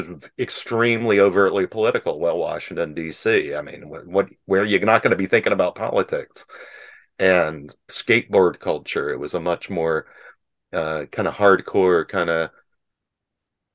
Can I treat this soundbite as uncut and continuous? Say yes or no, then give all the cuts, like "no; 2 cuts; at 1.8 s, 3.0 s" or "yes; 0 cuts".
no; 1 cut; at 7.9 s